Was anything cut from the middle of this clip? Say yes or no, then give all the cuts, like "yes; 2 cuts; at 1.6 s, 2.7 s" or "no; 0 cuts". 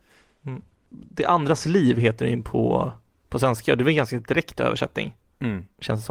no; 0 cuts